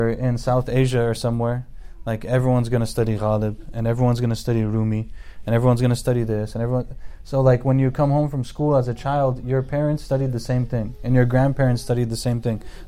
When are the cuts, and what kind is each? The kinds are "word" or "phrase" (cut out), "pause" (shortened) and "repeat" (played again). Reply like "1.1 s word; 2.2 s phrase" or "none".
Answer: none